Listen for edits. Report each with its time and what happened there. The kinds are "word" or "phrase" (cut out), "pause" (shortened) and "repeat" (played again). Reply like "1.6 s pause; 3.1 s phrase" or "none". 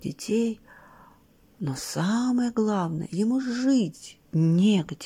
none